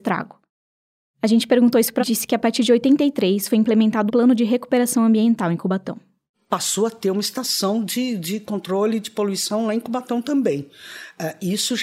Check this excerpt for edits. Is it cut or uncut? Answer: cut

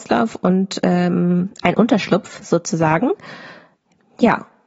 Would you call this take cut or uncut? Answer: uncut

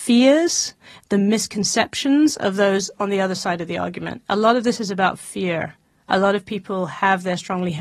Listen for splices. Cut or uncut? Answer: uncut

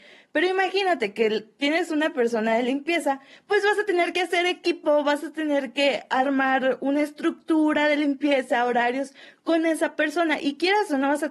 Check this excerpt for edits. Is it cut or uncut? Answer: uncut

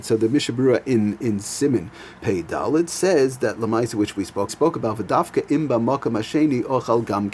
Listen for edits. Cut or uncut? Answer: cut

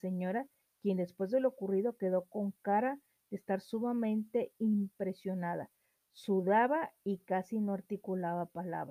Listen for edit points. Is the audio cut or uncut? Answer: uncut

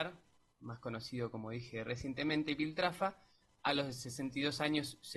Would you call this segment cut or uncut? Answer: uncut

